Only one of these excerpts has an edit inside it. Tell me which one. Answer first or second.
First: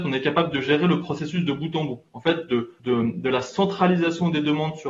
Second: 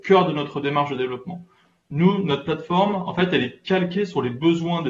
first